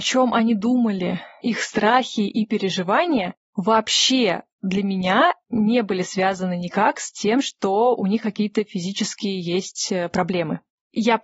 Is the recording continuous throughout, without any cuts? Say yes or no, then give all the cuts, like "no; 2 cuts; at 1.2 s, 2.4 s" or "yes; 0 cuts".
yes; 0 cuts